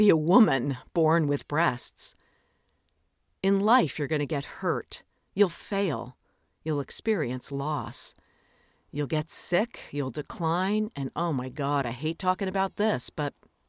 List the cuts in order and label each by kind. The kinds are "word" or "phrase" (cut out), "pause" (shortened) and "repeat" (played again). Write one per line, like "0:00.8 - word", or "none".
none